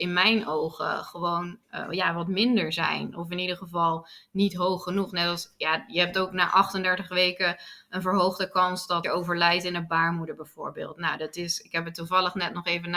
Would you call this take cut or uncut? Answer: cut